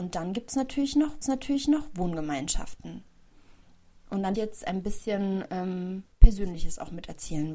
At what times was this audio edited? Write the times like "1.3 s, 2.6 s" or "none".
1.2 s, 4.3 s, 6.1 s